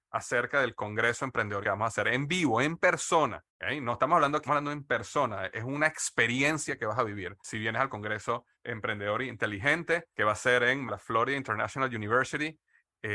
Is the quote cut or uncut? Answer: cut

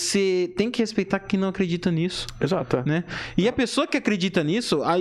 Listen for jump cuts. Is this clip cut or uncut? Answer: uncut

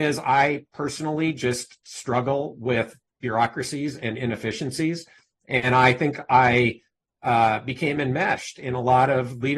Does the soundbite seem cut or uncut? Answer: uncut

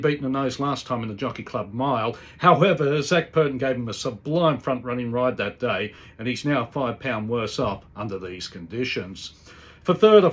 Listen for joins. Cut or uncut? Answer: uncut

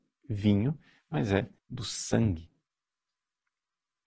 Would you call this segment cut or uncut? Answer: cut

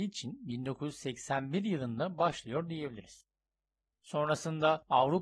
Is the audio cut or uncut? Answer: uncut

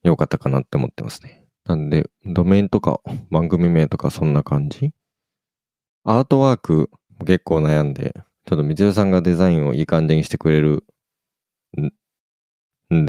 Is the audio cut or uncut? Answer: cut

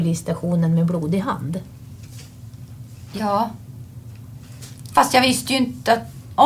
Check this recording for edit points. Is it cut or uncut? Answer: uncut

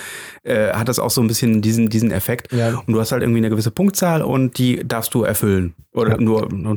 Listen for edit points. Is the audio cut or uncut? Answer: uncut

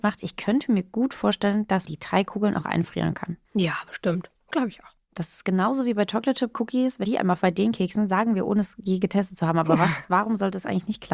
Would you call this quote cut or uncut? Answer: cut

